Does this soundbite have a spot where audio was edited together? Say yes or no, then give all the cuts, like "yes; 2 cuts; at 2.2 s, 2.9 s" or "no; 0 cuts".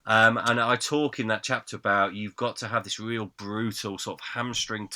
no; 0 cuts